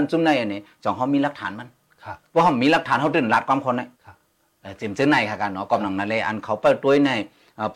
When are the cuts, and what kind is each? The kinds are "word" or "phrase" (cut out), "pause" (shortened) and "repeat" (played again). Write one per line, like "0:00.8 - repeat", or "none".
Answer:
0:03.9 - pause

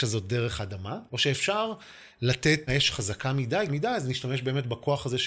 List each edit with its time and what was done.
0:01.1 - pause
0:02.7 - word
0:03.7 - word

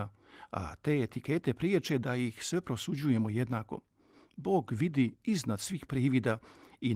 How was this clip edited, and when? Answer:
none

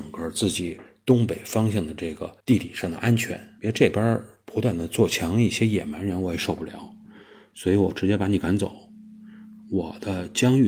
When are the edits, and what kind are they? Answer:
0:02.4 - pause
0:03.6 - pause

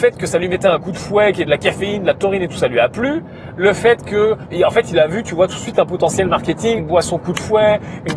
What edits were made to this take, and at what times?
0:04.5 - word
0:06.8 - phrase

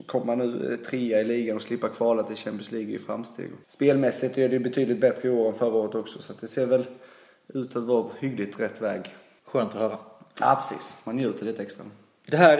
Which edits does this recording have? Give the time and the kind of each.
0:03.6 - pause

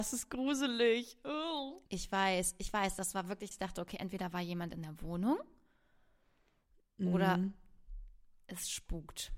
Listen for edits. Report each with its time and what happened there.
0:01.9 - pause
0:03.5 - word

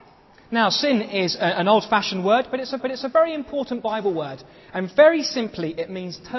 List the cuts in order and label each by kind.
0:02.8 - repeat

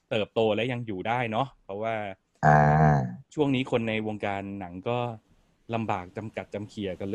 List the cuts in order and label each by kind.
none

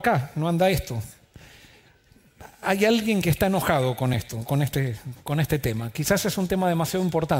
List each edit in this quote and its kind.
none

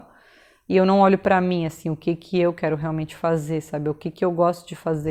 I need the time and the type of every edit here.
none

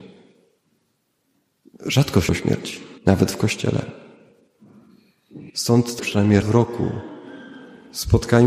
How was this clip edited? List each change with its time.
0:02.3 - word
0:03.0 - pause
0:05.5 - pause
0:06.0 - word
0:06.4 - word

